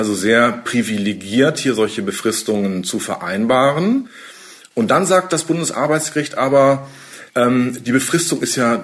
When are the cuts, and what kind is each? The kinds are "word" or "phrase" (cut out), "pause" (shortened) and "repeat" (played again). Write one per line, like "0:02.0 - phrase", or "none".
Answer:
0:07.3 - pause